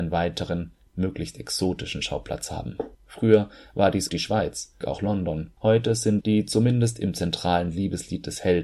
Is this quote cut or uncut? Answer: cut